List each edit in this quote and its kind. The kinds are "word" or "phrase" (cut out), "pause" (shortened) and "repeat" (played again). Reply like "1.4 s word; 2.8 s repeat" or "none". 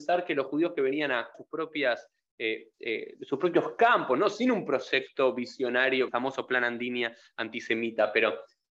1.3 s phrase; 2.7 s pause; 6.1 s phrase